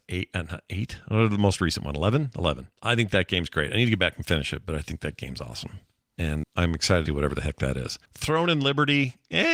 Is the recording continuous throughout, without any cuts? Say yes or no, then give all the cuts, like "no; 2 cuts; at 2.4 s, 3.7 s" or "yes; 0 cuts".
no; 4 cuts; at 2.8 s, 6.4 s, 7.1 s, 8.1 s